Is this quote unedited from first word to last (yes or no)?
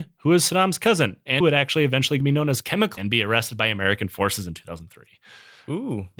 no